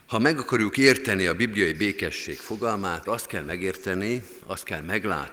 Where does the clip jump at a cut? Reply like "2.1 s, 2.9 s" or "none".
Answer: 3.0 s